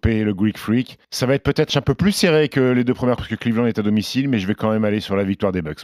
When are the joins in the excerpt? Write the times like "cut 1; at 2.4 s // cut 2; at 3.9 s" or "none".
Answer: cut 1; at 1.0 s // cut 2; at 1.7 s // cut 3; at 3.2 s